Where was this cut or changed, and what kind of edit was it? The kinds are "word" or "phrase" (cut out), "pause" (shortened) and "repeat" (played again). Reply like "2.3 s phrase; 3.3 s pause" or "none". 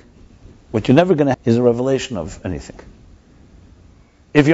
1.3 s word